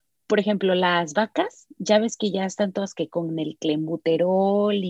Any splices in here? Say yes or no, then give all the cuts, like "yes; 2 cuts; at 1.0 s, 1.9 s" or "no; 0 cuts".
no; 0 cuts